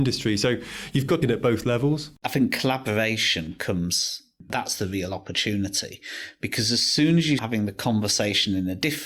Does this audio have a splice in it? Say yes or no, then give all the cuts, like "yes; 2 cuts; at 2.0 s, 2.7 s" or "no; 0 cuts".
yes; 3 cuts; at 1.2 s, 2.2 s, 7.4 s